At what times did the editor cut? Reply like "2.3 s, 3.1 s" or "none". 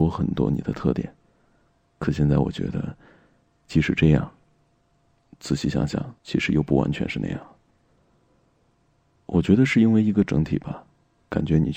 6.2 s